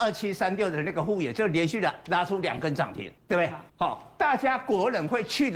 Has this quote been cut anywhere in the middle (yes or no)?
yes